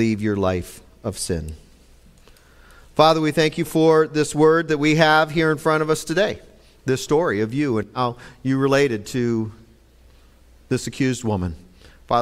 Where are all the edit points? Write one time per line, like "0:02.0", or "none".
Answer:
none

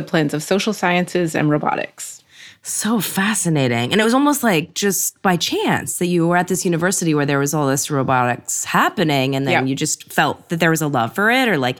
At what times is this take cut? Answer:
none

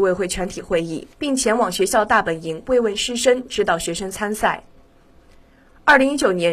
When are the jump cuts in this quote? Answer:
0:01.1

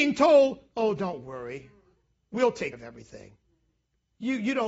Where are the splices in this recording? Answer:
0:02.7

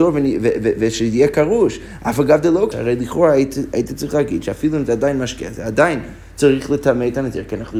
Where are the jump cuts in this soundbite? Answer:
0:02.7

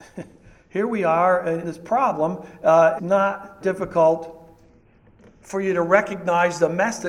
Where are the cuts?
0:01.6
0:03.0
0:03.6

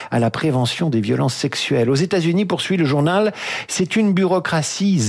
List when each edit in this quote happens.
none

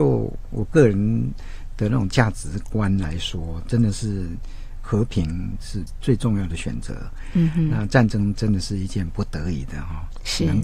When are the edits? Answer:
0:04.8

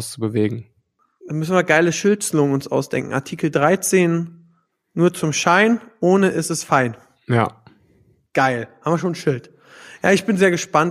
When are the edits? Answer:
none

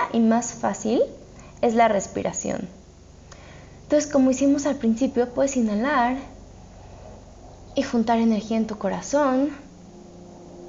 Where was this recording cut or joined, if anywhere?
none

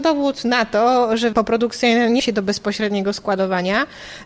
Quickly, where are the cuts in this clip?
0:01.3
0:02.2

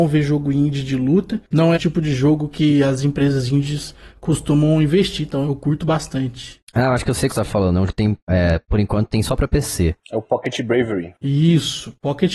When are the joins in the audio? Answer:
0:01.7
0:05.4
0:07.3
0:07.9

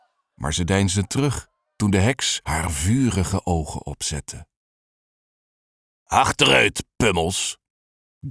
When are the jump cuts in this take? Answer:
none

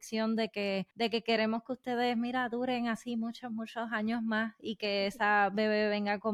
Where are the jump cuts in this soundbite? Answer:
0:00.9

